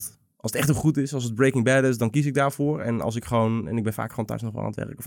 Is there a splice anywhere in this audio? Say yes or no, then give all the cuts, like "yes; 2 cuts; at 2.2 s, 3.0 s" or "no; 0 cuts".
no; 0 cuts